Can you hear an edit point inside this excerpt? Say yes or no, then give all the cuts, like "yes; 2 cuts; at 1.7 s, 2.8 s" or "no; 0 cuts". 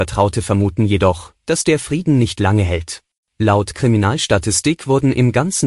yes; 1 cut; at 3.1 s